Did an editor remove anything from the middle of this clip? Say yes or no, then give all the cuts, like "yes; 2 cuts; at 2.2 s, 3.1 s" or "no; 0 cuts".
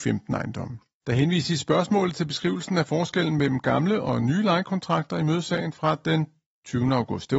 no; 0 cuts